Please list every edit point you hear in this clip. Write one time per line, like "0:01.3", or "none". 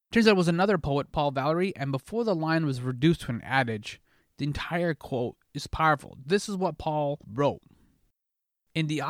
0:07.2

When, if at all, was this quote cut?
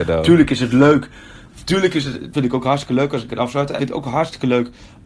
0:02.3
0:03.3
0:03.8

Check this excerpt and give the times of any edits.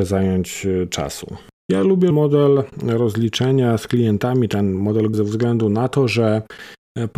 0:01.5
0:02.1
0:05.1

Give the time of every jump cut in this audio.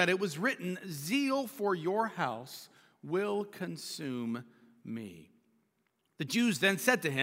none

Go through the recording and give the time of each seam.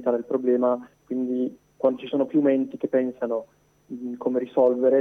0:00.9

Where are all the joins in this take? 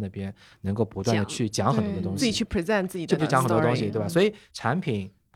0:03.2

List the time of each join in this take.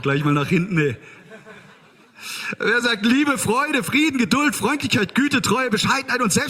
none

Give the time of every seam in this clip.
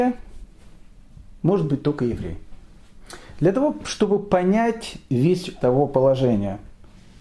0:01.4
0:05.6

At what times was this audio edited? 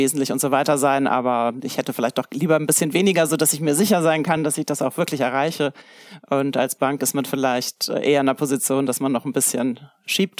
none

